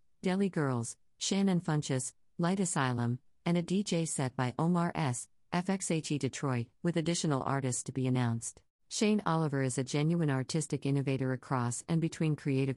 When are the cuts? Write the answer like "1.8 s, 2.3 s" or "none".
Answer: 6.7 s, 8.7 s